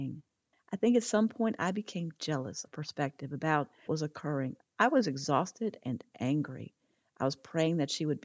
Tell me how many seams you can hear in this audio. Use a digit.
3